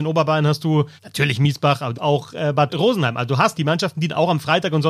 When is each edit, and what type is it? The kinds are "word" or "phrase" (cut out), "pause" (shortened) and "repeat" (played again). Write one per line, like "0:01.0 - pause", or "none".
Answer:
0:01.0 - pause
0:01.9 - phrase
0:02.7 - word
0:03.5 - word